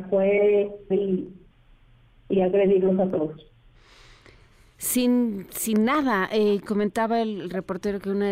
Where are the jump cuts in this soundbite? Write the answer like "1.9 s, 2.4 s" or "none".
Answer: 0.9 s, 1.5 s, 6.7 s